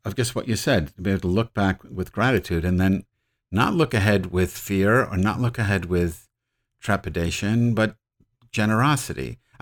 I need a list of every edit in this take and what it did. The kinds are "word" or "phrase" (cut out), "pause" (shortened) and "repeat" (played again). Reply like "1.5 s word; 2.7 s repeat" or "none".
none

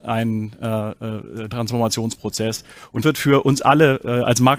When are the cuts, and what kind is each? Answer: 1.5 s word; 3.0 s word

